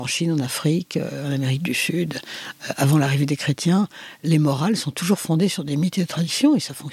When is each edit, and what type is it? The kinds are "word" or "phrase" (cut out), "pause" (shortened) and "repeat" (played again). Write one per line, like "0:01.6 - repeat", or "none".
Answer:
none